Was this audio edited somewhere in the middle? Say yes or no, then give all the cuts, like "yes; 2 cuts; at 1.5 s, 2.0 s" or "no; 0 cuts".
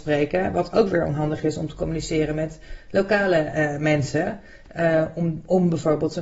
no; 0 cuts